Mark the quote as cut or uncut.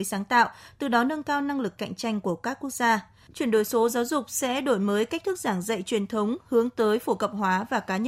uncut